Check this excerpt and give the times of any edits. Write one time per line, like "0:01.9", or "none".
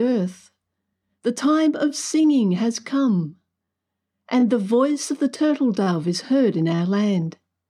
none